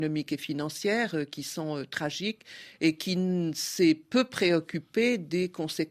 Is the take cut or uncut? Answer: uncut